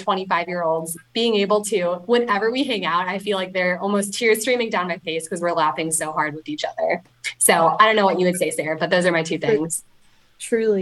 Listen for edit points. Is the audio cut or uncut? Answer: uncut